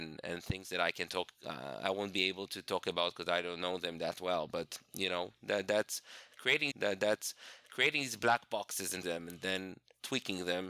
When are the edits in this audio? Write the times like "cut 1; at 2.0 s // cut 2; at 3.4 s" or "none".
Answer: cut 1; at 1.1 s // cut 2; at 6.7 s // cut 3; at 9.0 s